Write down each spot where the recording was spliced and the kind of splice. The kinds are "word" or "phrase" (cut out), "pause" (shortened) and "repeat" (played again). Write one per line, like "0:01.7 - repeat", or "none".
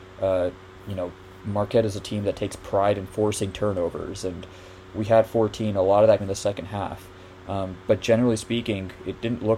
0:03.1 - word
0:06.2 - word